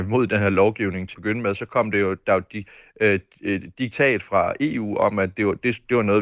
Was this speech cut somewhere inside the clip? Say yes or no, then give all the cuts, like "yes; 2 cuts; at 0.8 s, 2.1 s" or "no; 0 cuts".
yes; 1 cut; at 1.1 s